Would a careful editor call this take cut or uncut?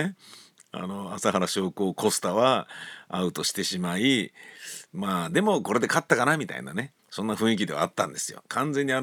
cut